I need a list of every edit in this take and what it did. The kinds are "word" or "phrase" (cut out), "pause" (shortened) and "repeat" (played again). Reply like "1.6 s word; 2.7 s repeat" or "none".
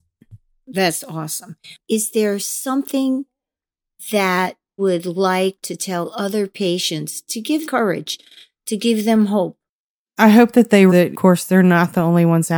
4.8 s word; 7.6 s word; 10.9 s word